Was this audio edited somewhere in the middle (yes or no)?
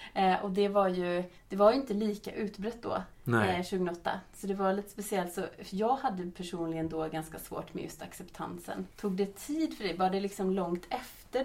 yes